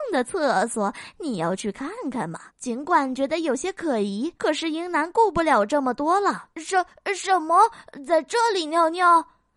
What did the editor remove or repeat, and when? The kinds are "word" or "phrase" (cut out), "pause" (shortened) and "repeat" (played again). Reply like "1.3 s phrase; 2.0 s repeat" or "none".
2.5 s pause; 4.4 s pause; 6.5 s pause